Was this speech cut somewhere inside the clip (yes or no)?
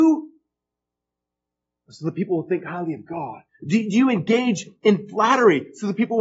yes